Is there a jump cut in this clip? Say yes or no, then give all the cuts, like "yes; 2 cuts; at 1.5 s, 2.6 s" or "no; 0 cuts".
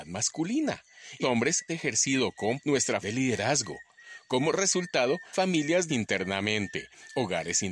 yes; 6 cuts; at 1.2 s, 1.7 s, 2.6 s, 3.0 s, 5.3 s, 5.9 s